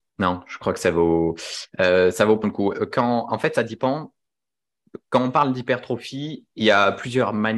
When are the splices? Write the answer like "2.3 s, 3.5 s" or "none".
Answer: 2.4 s

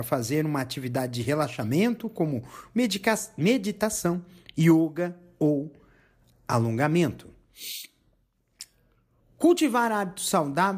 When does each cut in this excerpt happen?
none

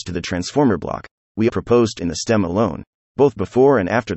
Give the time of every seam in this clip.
1.5 s, 2.0 s

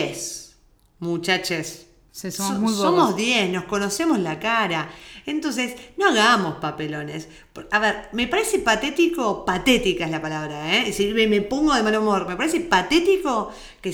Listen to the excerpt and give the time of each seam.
none

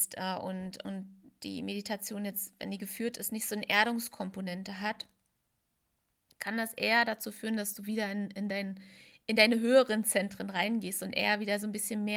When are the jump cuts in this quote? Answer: none

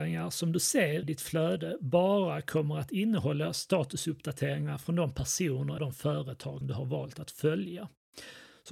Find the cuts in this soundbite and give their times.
1.0 s, 5.8 s, 6.6 s

